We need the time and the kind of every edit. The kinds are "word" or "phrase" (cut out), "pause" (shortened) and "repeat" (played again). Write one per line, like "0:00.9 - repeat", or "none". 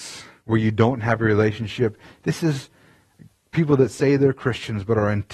none